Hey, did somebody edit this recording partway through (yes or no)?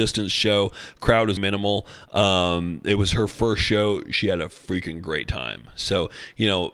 yes